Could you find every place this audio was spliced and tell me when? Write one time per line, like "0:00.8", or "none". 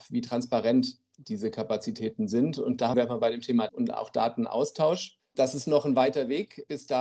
0:02.9
0:03.7

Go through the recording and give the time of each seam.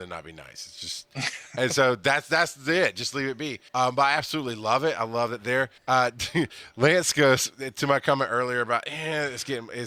0:03.7
0:05.8

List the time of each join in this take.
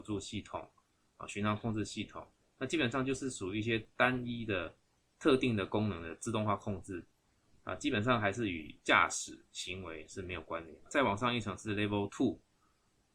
none

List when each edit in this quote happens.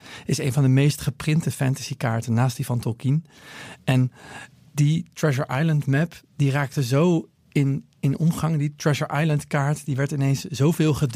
none

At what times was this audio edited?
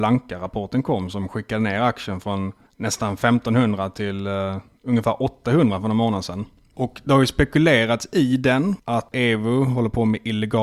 none

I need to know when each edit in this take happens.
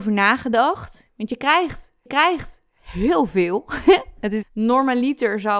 0:02.1
0:04.4

